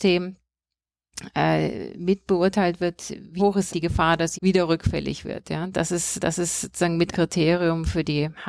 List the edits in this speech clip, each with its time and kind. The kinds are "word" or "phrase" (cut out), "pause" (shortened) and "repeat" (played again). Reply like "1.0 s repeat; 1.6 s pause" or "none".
3.4 s phrase; 3.7 s word; 4.3 s word; 6.2 s repeat; 7.1 s word